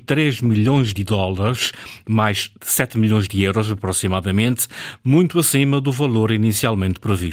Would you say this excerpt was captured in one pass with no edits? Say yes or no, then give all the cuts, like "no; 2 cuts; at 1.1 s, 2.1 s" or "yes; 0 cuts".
yes; 0 cuts